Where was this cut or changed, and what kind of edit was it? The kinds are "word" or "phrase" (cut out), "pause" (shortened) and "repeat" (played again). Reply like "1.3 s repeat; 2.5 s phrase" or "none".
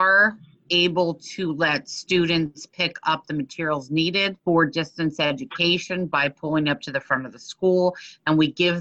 4.4 s pause